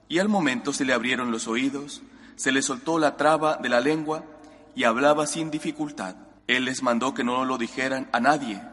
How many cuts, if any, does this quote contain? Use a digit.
1